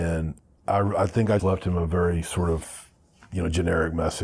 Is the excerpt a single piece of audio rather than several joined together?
no; 1 cut; at 1.4 s

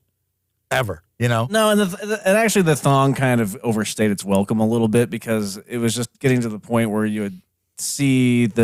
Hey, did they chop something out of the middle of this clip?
yes; 1 cut; at 6.1 s

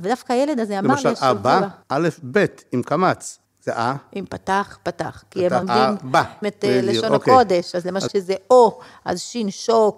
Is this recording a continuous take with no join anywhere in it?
no; 5 cuts; at 1.8 s, 3.4 s, 5.6 s, 6.4 s, 8.1 s

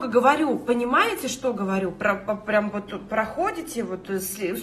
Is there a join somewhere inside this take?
no; 0 cuts

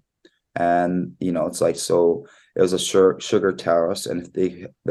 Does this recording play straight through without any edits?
yes; 0 cuts

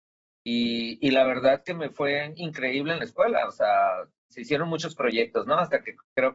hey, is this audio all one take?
yes; 0 cuts

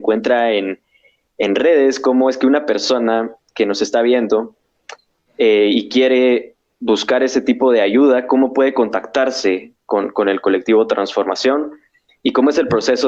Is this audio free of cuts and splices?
yes; 0 cuts

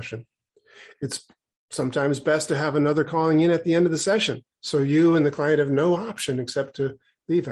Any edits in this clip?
yes; 2 cuts; at 3.1 s, 4.5 s

